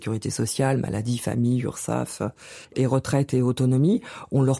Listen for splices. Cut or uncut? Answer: cut